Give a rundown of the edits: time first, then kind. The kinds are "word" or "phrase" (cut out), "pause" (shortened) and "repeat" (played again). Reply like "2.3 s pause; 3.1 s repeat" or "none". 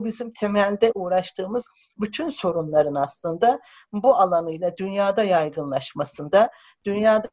none